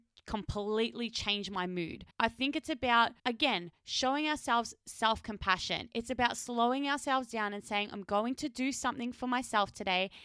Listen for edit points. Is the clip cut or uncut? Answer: cut